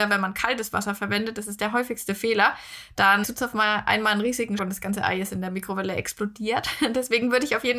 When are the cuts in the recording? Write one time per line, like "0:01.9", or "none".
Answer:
0:03.2
0:04.6